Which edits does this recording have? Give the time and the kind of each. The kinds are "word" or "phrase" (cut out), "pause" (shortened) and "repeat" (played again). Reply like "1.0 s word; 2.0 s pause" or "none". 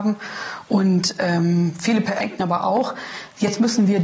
2.2 s word